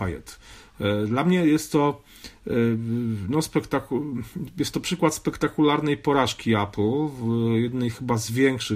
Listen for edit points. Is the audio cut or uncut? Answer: uncut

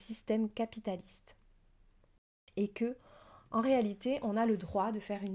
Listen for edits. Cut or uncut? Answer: uncut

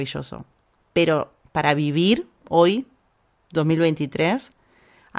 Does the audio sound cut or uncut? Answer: cut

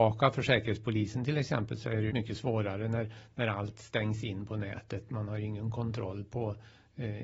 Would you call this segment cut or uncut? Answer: cut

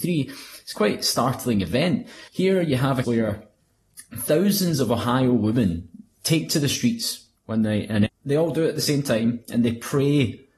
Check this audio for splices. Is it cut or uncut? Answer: cut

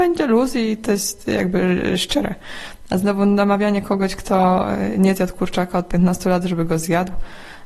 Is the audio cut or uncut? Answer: uncut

